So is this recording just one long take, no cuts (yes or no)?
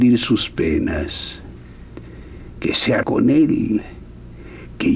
no